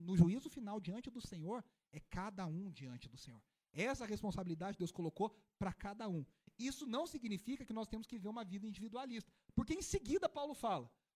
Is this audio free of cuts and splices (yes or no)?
yes